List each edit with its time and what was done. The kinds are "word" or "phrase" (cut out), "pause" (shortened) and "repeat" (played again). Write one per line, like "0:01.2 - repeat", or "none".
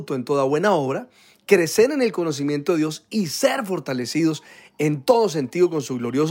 none